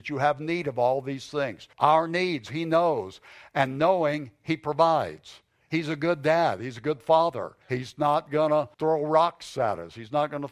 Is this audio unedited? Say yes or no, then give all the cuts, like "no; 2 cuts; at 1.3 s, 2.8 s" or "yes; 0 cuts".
no; 3 cuts; at 1.7 s, 7.6 s, 8.7 s